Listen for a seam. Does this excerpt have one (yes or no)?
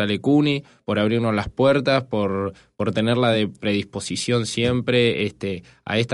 no